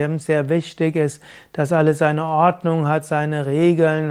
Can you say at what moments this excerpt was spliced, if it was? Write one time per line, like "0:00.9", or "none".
none